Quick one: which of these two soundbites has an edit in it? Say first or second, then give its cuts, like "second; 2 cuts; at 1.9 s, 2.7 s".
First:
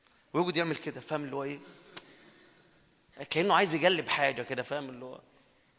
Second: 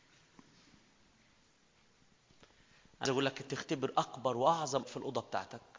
second; 3 cuts; at 3.1 s, 3.5 s, 4.8 s